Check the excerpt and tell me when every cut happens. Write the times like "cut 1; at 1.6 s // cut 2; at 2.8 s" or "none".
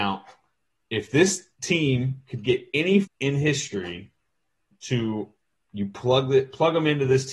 cut 1; at 1.5 s // cut 2; at 3.0 s